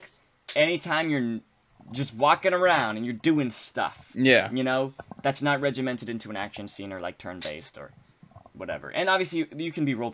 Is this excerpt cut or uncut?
uncut